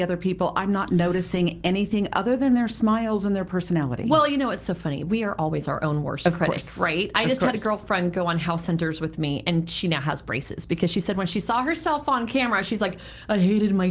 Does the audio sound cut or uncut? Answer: uncut